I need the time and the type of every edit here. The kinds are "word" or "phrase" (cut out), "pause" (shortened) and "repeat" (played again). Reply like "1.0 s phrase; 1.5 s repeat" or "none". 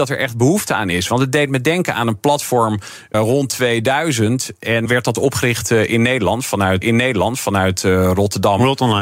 3.1 s word; 4.8 s word; 6.8 s repeat